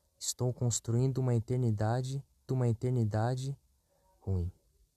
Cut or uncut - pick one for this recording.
cut